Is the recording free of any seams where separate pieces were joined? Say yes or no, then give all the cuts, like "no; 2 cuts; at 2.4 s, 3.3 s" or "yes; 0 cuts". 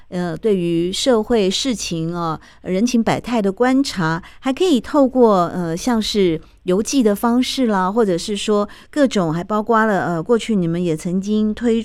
yes; 0 cuts